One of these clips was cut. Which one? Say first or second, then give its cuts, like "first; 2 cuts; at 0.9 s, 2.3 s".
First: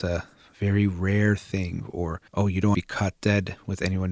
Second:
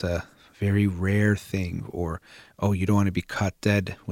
first; 2 cuts; at 2.3 s, 2.7 s